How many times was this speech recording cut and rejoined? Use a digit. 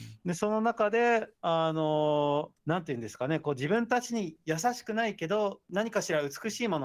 2